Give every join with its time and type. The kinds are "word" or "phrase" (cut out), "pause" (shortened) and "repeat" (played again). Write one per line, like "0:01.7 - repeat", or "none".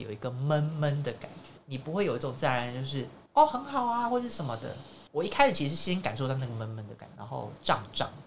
0:03.3 - pause